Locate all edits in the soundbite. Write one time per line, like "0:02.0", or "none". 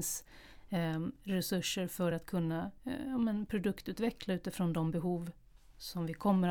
none